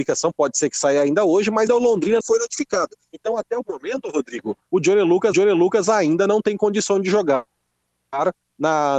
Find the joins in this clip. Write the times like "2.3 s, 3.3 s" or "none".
1.7 s, 2.2 s, 3.6 s, 5.3 s